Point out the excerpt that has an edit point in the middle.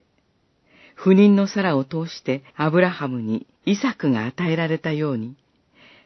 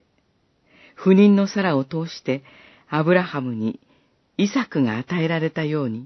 first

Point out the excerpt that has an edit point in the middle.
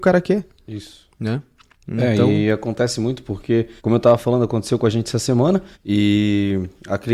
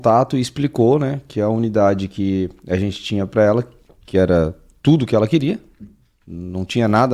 first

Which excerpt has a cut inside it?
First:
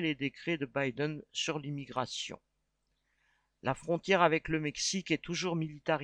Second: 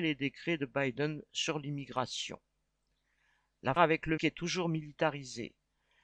second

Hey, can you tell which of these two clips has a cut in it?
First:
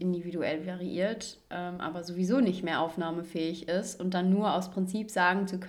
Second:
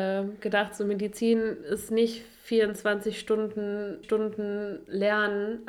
second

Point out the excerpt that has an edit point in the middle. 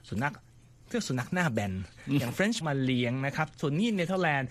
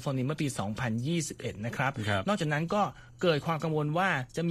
first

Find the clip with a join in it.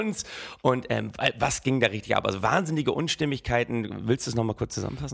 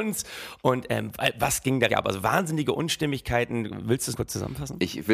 second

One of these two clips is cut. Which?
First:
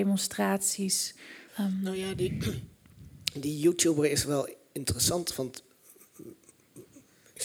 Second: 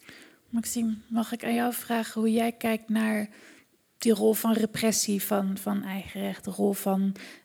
first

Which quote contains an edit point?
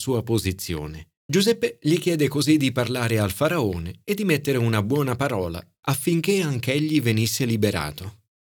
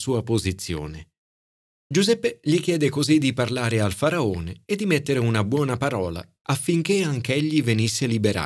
first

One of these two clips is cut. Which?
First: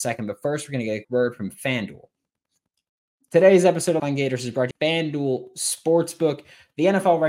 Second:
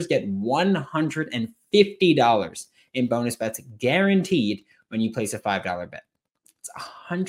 first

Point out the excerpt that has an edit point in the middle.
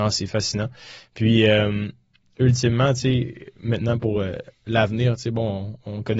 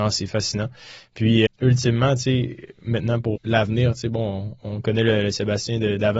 second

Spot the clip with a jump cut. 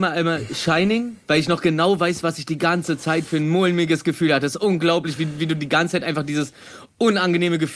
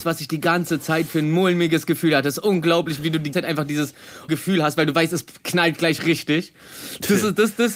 second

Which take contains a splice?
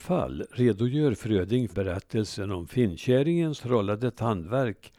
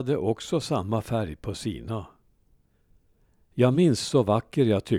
first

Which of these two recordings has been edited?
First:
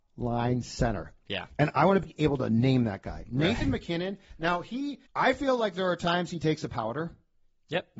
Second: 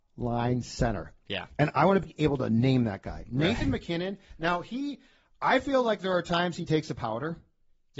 first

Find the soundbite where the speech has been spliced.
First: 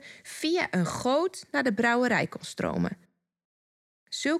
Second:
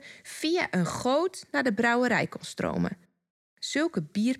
second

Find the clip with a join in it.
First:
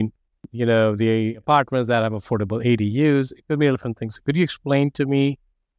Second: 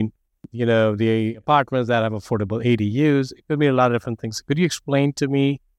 first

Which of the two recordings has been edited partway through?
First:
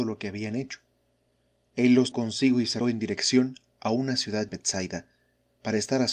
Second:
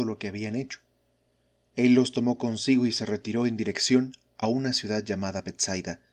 first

